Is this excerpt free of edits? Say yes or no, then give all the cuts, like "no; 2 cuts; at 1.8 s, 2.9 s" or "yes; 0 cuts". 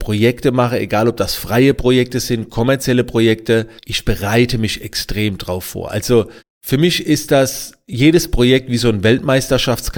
no; 2 cuts; at 3.8 s, 6.4 s